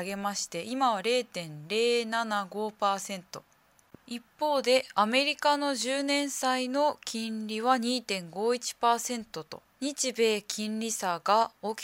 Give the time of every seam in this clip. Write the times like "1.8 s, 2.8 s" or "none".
4.0 s, 9.7 s